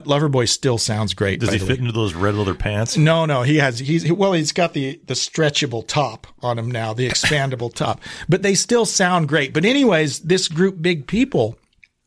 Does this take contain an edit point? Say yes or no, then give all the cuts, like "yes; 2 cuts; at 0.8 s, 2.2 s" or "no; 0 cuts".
no; 0 cuts